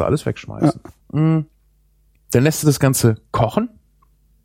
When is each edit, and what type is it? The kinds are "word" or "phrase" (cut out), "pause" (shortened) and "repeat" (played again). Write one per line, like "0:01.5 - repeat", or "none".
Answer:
0:01.0 - pause